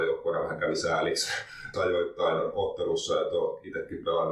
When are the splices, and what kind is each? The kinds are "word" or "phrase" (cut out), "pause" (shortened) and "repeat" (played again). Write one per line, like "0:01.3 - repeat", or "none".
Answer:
0:01.7 - word

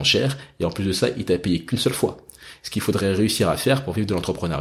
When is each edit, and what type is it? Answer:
none

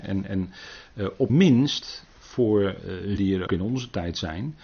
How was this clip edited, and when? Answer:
0:01.3 - word
0:03.2 - word
0:03.5 - word

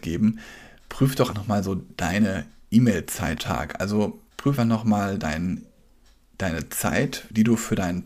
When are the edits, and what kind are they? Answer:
0:01.3 - word
0:03.4 - word
0:04.6 - word

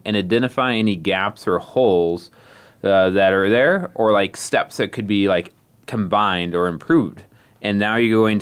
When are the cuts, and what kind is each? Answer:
none

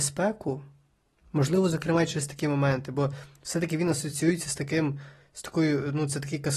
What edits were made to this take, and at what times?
none

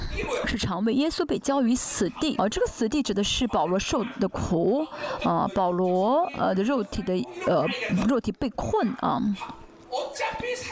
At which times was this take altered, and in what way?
0:02.4 - phrase

